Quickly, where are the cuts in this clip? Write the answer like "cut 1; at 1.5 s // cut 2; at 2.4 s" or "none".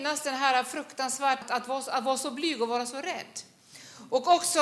cut 1; at 1.4 s